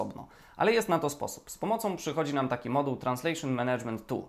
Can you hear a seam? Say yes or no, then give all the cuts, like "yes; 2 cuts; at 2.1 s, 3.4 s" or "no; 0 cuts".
no; 0 cuts